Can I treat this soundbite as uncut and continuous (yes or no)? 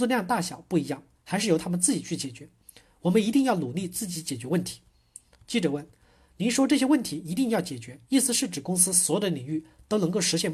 yes